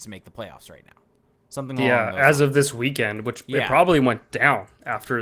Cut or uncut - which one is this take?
uncut